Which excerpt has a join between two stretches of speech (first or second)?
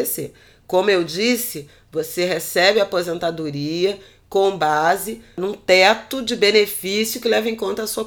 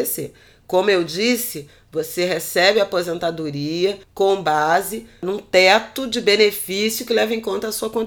second